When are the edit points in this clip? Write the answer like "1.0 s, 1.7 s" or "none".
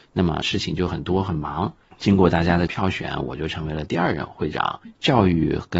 1.9 s